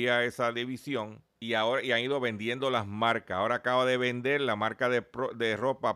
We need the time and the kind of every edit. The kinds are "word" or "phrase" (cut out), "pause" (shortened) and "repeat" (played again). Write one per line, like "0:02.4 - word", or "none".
0:01.3 - pause